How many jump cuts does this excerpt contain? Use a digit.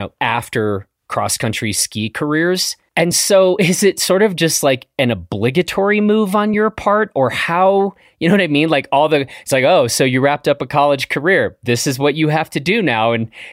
0